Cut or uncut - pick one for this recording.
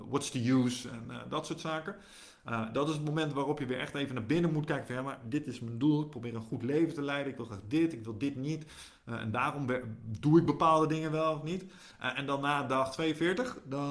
uncut